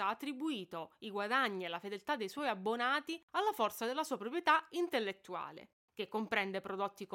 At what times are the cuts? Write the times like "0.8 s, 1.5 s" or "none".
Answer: none